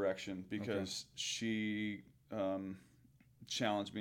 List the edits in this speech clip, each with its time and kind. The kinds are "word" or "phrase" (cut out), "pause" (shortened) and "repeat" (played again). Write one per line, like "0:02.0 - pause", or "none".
none